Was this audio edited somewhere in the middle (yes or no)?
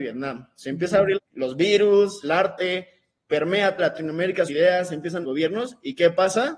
yes